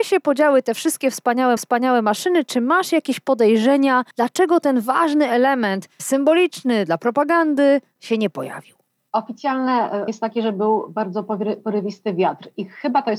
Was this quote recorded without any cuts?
no; 4 cuts; at 1.6 s, 4.1 s, 8.0 s, 10.1 s

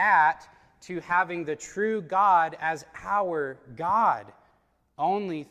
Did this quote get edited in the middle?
no; 0 cuts

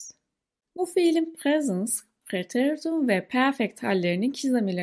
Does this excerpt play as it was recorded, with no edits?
yes; 0 cuts

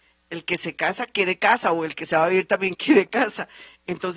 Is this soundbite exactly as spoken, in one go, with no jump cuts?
yes; 0 cuts

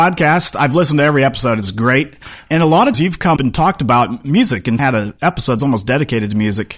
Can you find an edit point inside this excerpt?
yes; 4 cuts; at 2.9 s, 3.4 s, 4.8 s, 5.6 s

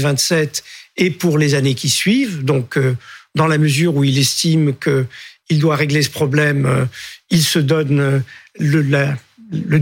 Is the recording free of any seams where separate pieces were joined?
yes; 0 cuts

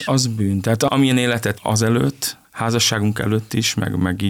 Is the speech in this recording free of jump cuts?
no; 1 cut; at 1.5 s

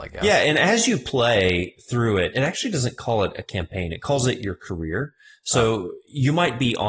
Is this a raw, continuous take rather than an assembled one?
no; 1 cut; at 2.3 s

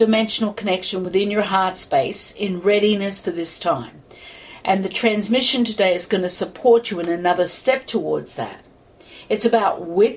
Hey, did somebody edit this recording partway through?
no; 0 cuts

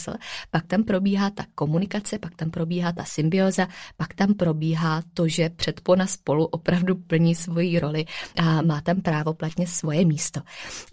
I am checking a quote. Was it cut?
no; 0 cuts

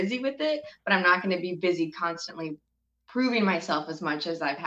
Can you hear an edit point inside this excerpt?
no; 0 cuts

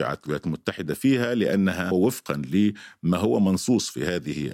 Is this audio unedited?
yes; 0 cuts

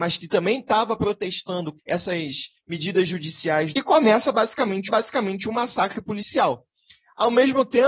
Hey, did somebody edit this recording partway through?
yes; 3 cuts; at 1.8 s, 3.7 s, 4.9 s

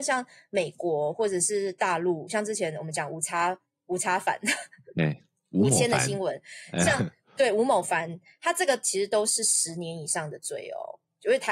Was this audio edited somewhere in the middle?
no; 0 cuts

